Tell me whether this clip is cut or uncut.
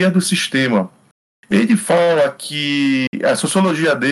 uncut